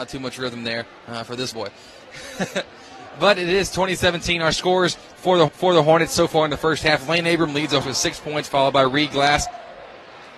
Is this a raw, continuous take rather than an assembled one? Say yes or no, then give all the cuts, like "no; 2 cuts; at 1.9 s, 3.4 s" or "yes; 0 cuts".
no; 3 cuts; at 1.5 s, 5.5 s, 7.8 s